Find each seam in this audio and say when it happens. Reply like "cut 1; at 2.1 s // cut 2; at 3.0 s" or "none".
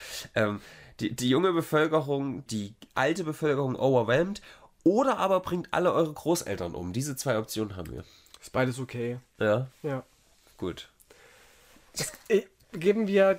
cut 1; at 2.5 s